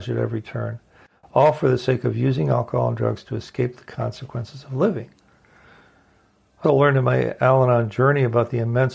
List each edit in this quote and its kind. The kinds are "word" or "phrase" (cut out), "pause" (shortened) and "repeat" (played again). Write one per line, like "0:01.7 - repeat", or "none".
0:06.6 - word